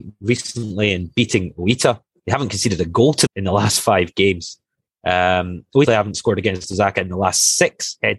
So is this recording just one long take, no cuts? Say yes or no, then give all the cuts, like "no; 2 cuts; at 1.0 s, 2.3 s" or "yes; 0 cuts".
no; 2 cuts; at 3.3 s, 5.9 s